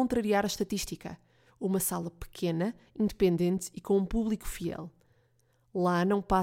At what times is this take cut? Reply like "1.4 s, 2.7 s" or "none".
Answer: none